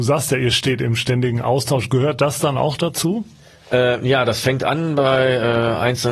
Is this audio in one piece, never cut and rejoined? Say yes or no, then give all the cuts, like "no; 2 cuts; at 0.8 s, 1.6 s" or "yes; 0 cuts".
yes; 0 cuts